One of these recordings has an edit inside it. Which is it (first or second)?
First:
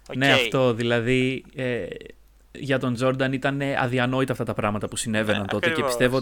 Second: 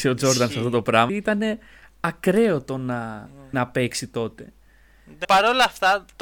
second